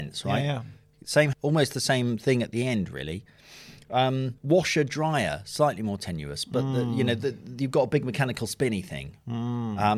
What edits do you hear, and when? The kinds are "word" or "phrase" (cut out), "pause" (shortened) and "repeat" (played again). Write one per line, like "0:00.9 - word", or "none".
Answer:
0:01.3 - word
0:04.4 - pause